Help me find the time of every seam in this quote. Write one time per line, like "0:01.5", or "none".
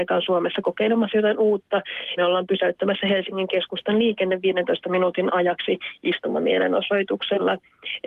0:02.2